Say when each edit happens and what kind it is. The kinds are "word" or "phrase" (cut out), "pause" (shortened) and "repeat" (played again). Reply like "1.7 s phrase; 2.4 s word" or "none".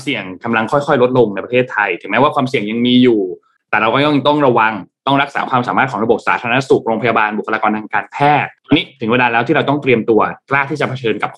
3.6 s pause; 8.6 s pause